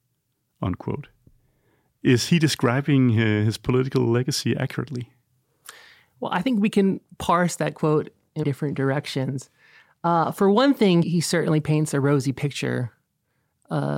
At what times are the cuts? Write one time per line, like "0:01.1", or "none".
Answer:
0:08.4
0:11.0